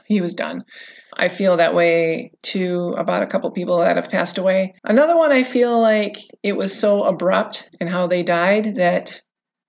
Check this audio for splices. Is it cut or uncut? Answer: cut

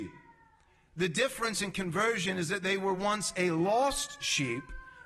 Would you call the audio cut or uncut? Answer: uncut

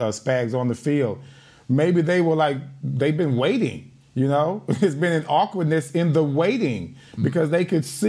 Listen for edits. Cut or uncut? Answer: uncut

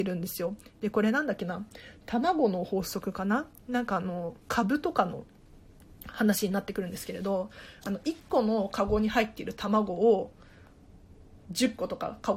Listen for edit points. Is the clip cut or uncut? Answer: cut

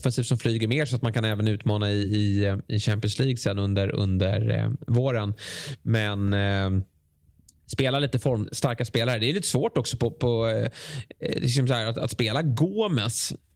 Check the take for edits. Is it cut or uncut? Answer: uncut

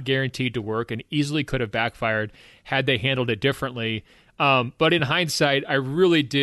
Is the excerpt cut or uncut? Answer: uncut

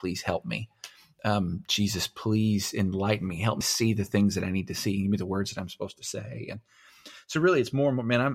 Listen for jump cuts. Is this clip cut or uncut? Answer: cut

